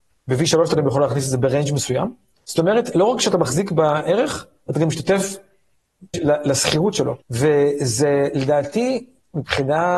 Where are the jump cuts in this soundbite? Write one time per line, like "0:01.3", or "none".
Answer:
0:02.4
0:06.1
0:07.2

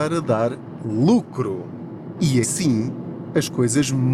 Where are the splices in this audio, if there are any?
0:02.4

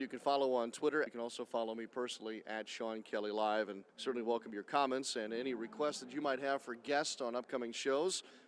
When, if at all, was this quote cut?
0:01.1
0:03.9

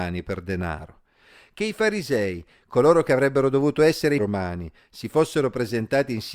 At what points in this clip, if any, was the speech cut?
0:04.2

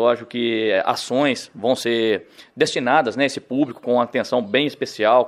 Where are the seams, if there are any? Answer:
none

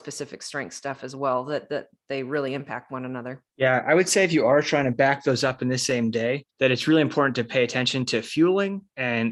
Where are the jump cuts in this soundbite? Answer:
0:03.5
0:06.5

